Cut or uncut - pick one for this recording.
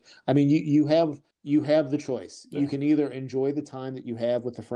cut